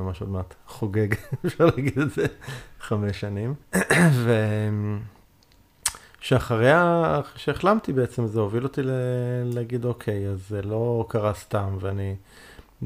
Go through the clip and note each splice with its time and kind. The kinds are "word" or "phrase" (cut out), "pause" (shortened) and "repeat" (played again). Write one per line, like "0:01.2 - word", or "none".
0:03.6 - pause